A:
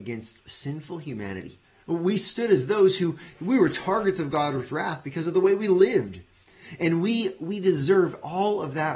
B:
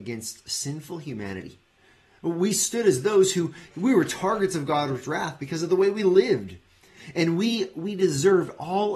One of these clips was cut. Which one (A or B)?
A